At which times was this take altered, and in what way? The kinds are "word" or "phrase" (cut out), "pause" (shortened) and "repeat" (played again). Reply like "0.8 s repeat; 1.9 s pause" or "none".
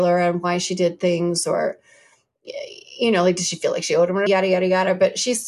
4.3 s word

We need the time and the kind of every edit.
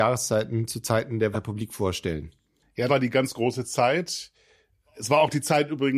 1.3 s word; 2.9 s word

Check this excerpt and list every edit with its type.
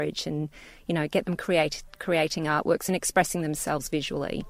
none

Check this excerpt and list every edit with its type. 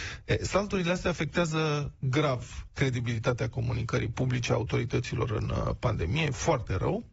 none

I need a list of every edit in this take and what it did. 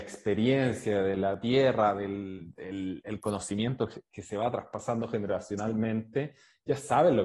none

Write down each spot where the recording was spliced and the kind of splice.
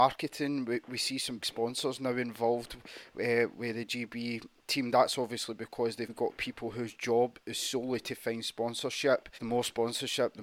1.4 s word; 6.1 s word; 9.4 s pause

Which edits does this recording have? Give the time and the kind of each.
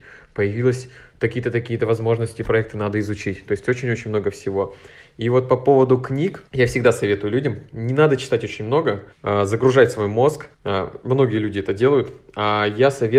6.5 s pause; 9.1 s pause; 10.5 s pause

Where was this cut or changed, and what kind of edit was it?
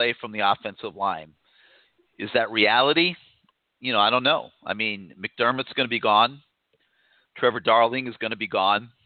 none

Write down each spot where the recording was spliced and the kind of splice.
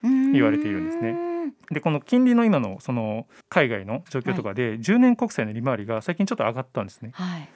1.6 s pause; 3.4 s pause

